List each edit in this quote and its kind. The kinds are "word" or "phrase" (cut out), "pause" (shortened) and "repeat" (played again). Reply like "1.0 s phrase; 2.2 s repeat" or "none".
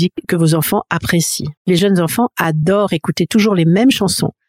1.6 s pause